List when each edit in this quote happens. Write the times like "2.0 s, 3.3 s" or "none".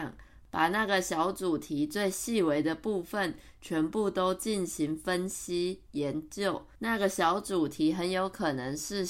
6.7 s